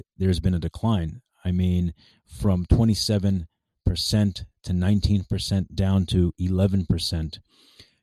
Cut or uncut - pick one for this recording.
uncut